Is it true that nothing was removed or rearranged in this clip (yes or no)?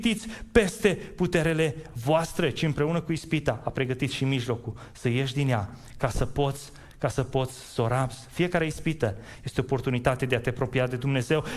yes